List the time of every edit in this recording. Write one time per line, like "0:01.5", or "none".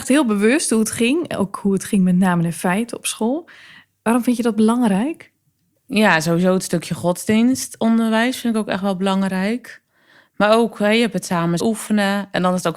0:11.6